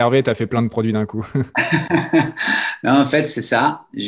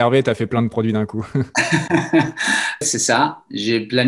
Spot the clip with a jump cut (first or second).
second